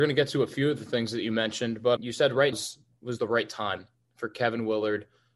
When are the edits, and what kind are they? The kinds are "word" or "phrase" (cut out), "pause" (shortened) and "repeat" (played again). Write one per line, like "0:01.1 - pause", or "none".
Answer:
0:02.0 - word
0:02.5 - word

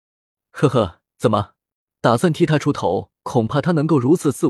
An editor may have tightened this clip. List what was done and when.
0:01.7 - pause
0:03.2 - pause

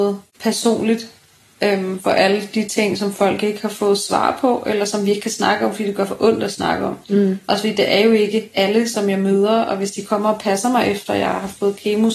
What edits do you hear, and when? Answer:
none

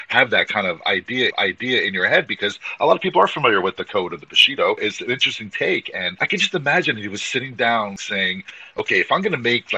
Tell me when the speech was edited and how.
0:01.3 - repeat

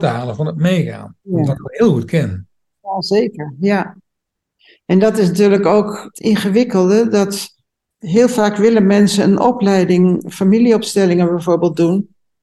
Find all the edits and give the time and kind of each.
0:01.2 - pause
0:06.1 - word

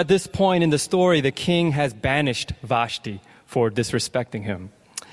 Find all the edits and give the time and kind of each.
none

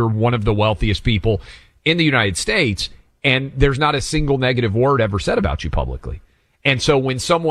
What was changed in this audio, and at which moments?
none

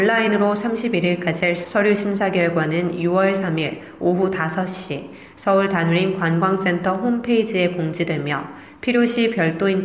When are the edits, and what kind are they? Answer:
0:01.6 - word

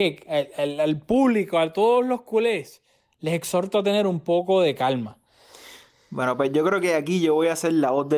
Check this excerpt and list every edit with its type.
none

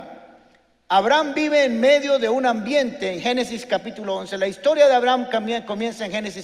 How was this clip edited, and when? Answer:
none

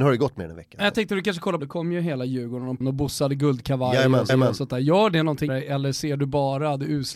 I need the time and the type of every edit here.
0:01.6 - phrase
0:02.8 - phrase
0:04.3 - repeat
0:05.5 - word

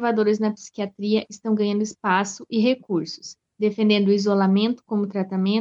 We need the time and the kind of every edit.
0:03.5 - pause

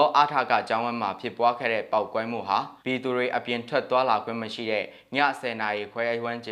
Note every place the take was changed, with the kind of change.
0:02.8 - pause

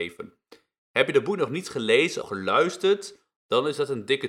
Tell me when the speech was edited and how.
0:02.2 - word

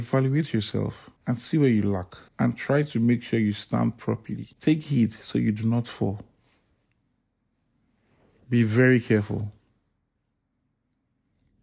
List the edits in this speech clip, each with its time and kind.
0:01.2 - pause
0:02.3 - pause
0:04.5 - pause

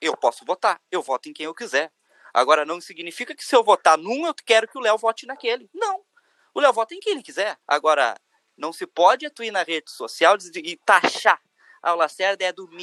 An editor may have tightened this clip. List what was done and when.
0:07.6 - pause

